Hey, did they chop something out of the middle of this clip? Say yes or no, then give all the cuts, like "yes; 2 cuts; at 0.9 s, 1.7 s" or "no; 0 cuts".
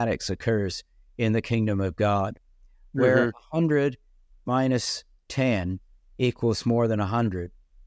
no; 0 cuts